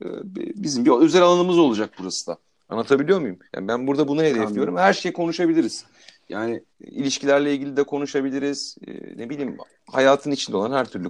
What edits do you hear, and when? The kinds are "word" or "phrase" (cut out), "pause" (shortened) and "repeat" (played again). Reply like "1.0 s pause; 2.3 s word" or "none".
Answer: 2.5 s pause; 3.5 s pause; 6.7 s pause